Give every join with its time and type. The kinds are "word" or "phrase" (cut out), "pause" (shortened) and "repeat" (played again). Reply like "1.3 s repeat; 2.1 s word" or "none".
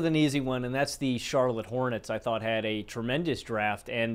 none